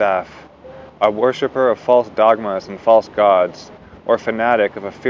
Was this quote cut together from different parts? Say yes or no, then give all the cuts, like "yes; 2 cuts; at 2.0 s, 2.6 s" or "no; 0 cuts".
no; 0 cuts